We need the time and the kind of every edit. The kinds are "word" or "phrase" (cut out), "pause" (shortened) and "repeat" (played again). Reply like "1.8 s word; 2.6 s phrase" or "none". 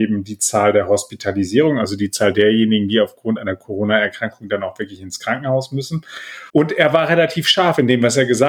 6.5 s pause